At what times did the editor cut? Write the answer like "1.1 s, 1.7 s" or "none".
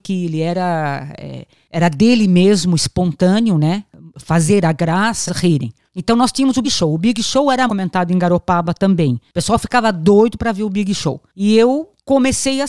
5.3 s, 6.6 s, 7.7 s